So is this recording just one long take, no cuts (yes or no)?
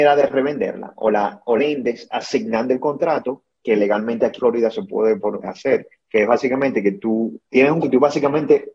no